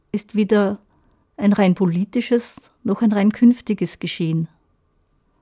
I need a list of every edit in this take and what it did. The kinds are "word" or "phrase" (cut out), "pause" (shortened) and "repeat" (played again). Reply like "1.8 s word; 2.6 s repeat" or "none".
none